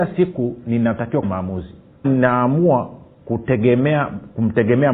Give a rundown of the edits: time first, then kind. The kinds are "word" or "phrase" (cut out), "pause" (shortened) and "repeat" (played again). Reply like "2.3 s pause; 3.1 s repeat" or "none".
1.2 s word; 2.0 s word